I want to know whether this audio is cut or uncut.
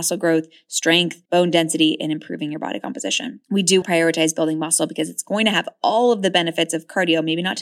cut